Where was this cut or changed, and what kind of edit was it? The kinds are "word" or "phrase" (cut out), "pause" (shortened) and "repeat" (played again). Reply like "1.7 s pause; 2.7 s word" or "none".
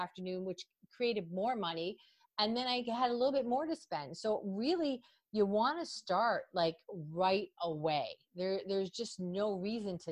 none